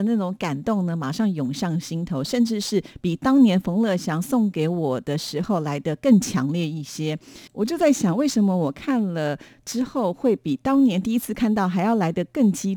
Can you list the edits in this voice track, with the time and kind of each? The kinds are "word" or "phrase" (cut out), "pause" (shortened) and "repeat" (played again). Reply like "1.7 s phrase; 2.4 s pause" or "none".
7.5 s pause